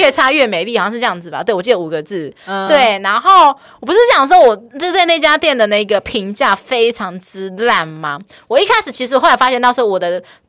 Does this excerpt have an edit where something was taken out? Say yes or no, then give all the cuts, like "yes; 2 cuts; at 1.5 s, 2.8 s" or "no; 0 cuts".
no; 0 cuts